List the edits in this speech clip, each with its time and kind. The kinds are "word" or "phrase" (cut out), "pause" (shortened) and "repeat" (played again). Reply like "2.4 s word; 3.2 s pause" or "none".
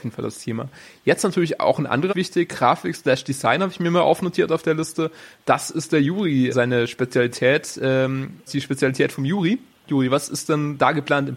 2.1 s word; 6.5 s word; 8.5 s word

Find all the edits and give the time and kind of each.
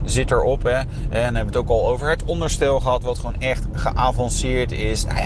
none

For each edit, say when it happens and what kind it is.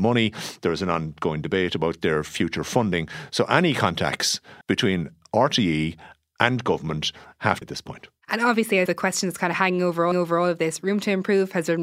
4.6 s pause; 7.6 s phrase; 8.9 s word; 10.1 s repeat

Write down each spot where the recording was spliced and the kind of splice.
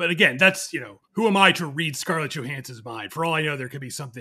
1.0 s pause

